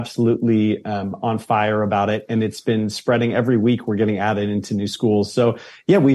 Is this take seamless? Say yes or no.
yes